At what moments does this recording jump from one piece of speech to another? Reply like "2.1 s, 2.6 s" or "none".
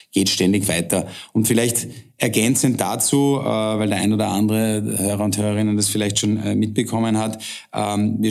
none